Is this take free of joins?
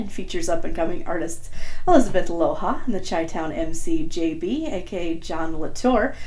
yes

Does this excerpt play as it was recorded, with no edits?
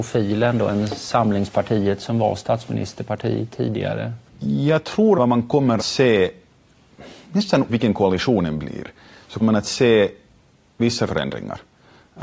no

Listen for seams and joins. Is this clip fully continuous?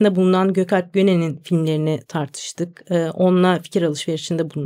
yes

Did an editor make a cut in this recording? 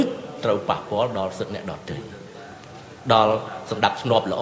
no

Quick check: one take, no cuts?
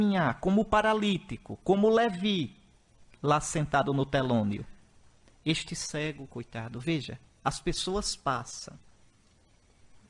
yes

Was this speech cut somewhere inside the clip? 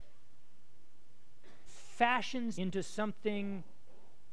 yes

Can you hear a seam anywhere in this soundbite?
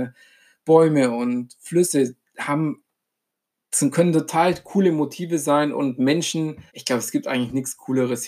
yes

